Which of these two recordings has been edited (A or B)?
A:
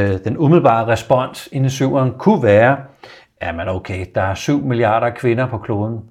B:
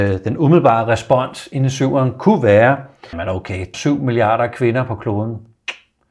B